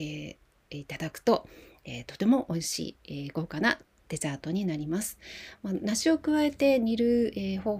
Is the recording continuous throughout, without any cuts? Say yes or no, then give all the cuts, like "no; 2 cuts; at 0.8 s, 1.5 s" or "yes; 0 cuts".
yes; 0 cuts